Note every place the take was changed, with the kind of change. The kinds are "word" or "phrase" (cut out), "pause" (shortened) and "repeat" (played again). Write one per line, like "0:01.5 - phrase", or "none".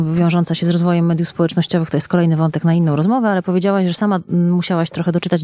none